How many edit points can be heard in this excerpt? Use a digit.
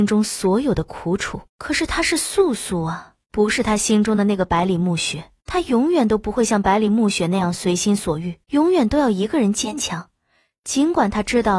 4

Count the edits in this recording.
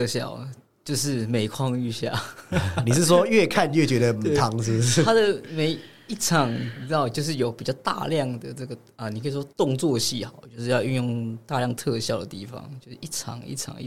1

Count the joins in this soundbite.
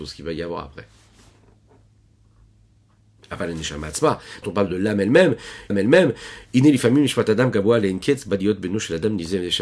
2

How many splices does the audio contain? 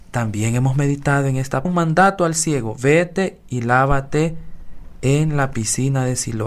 1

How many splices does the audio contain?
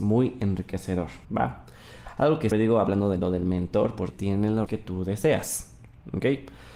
4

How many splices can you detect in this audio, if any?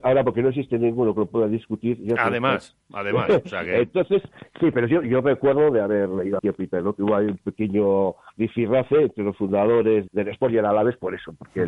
3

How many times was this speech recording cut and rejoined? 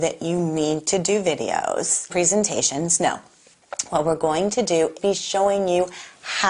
2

